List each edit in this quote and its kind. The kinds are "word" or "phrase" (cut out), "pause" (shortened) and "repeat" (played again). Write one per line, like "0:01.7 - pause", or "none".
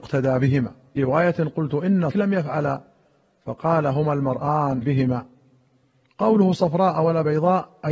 0:01.0 - word
0:02.1 - word
0:04.8 - word